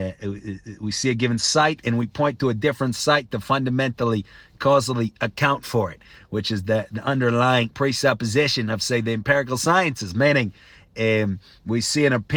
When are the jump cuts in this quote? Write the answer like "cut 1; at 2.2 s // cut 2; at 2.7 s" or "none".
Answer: none